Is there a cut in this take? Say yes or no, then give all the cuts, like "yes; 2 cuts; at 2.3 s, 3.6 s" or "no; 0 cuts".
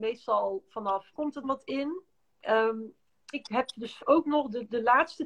yes; 4 cuts; at 1.1 s, 1.4 s, 3.3 s, 4.0 s